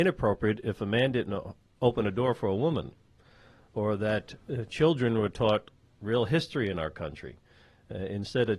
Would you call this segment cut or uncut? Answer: uncut